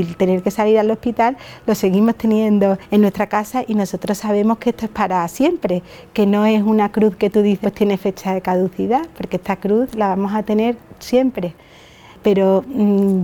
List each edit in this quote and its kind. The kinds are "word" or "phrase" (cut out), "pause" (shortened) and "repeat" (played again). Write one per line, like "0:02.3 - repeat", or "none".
0:07.6 - word